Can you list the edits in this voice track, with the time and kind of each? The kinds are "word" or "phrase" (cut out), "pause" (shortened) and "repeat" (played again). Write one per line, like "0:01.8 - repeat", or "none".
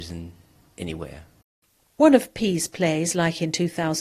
none